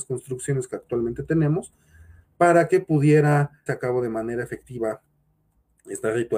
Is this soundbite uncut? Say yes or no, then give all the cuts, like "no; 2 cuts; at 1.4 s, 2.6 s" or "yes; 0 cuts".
no; 1 cut; at 3.7 s